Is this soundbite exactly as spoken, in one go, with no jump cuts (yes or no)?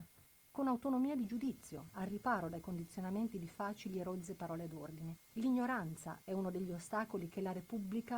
no